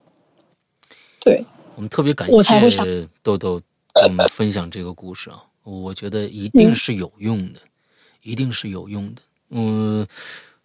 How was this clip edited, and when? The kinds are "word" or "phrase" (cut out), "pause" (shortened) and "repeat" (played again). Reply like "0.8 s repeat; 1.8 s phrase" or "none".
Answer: none